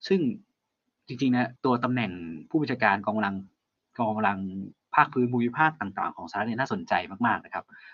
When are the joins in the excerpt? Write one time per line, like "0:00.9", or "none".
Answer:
0:01.6

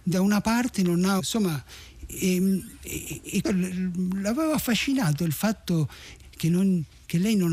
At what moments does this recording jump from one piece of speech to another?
0:01.2
0:03.4
0:06.2

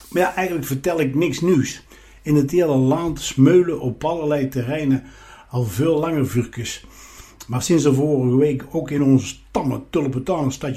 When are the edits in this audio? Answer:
none

